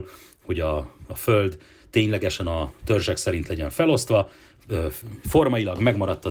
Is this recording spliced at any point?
no; 0 cuts

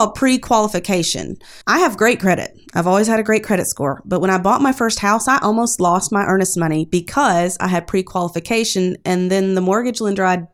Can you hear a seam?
yes; 1 cut; at 1.6 s

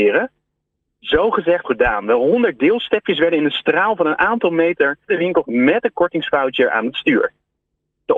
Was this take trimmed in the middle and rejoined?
yes; 3 cuts; at 1.6 s, 5.1 s, 5.4 s

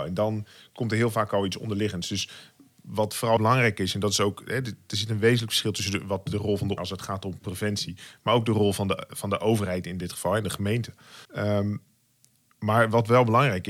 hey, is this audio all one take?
no; 3 cuts; at 3.4 s, 6.8 s, 11.2 s

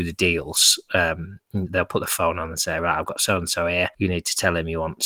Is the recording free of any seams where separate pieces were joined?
yes; 0 cuts

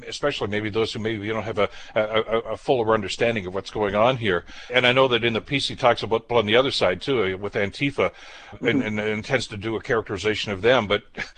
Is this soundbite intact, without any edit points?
no; 3 cuts; at 4.7 s, 6.3 s, 8.5 s

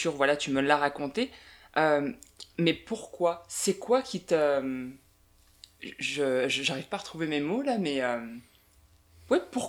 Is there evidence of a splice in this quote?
no; 0 cuts

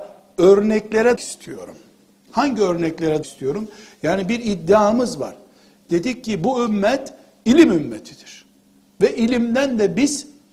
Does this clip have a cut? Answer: yes; 2 cuts; at 1.2 s, 3.2 s

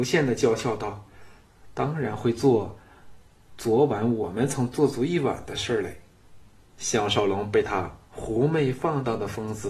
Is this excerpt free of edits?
yes; 0 cuts

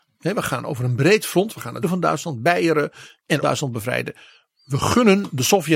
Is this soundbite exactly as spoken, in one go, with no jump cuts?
no; 2 cuts; at 1.8 s, 3.4 s

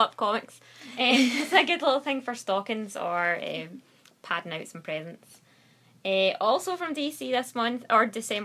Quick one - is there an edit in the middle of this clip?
no; 0 cuts

